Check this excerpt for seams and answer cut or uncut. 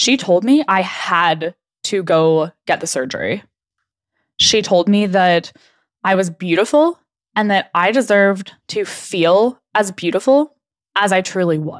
uncut